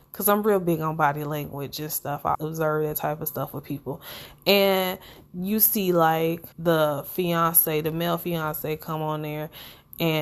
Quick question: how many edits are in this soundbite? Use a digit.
2